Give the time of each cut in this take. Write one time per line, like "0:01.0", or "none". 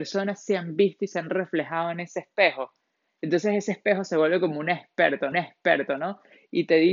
0:05.3